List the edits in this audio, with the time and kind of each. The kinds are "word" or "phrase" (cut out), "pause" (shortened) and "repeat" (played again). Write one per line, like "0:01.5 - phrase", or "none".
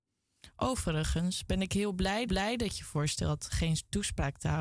0:02.3 - repeat